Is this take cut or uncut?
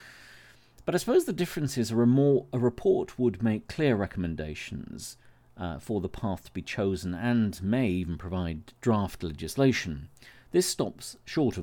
uncut